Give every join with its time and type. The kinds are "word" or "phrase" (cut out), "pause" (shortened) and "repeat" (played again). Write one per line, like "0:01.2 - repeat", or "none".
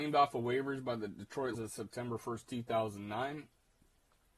0:01.5 - word